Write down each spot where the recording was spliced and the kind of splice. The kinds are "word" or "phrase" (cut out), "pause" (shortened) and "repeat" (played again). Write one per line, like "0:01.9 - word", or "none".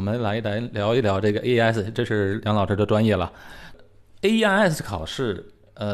none